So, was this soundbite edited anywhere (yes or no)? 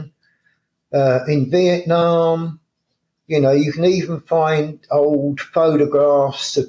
no